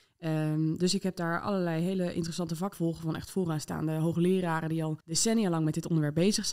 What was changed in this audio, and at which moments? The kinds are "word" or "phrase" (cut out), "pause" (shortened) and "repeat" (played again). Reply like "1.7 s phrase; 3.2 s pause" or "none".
2.7 s word; 5.0 s pause